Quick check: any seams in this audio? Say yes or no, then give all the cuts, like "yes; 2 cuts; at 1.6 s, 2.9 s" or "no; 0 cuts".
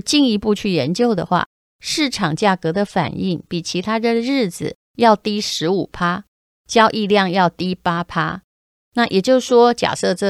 no; 0 cuts